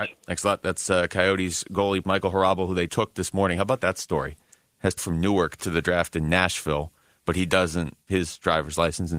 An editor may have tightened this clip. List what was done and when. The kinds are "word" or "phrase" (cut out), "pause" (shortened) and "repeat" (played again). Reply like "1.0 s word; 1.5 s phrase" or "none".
2.0 s word; 2.9 s word; 5.0 s word; 5.6 s word; 8.1 s word